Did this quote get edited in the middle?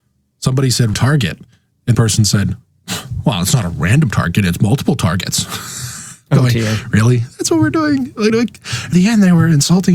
yes; 4 cuts; at 0.9 s, 1.9 s, 8.3 s, 8.9 s

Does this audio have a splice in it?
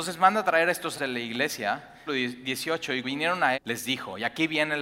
yes; 4 cuts; at 0.9 s, 2.1 s, 3.0 s, 3.5 s

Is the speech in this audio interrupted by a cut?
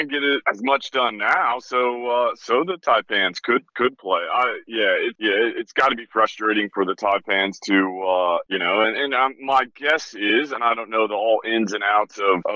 no; 0 cuts

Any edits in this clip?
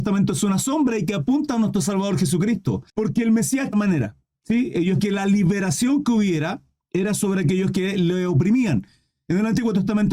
yes; 3 cuts; at 2.9 s, 3.7 s, 5.0 s

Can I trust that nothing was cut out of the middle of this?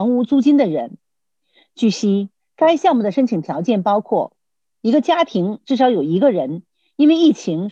yes; 0 cuts

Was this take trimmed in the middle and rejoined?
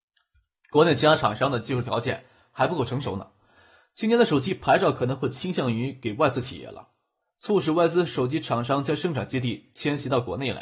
no; 0 cuts

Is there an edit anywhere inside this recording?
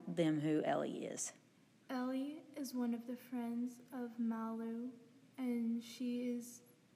no; 0 cuts

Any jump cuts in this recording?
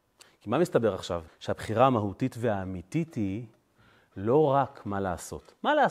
yes; 1 cut; at 1.3 s

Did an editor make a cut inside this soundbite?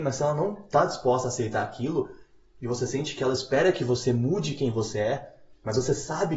no; 0 cuts

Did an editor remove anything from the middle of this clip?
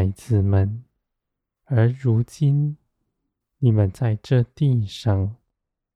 no; 0 cuts

